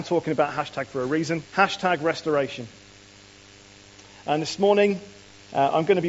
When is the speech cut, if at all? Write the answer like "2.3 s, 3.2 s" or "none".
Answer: 1.5 s